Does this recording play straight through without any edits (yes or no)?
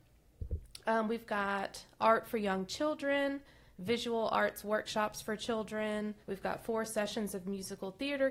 no